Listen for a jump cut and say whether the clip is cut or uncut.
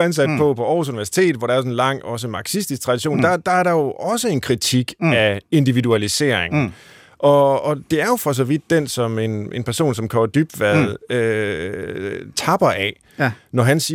uncut